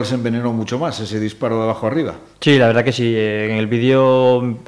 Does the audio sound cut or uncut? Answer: uncut